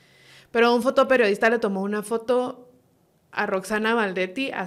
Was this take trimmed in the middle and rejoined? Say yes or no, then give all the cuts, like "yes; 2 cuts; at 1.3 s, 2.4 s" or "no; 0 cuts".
no; 0 cuts